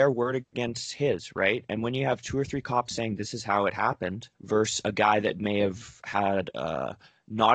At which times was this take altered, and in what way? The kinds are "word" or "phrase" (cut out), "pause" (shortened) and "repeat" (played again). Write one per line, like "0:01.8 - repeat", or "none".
0:04.3 - pause